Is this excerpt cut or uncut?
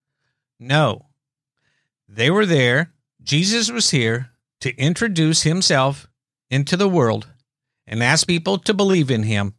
uncut